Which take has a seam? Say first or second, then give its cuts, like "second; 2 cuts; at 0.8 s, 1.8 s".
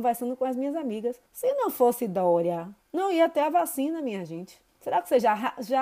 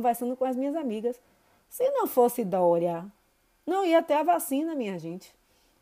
first; 3 cuts; at 1.3 s, 2.8 s, 4.7 s